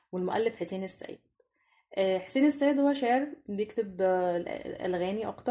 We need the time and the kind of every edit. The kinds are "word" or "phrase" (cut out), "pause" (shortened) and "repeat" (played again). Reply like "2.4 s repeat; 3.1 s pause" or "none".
none